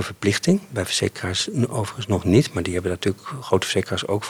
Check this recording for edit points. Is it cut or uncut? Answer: uncut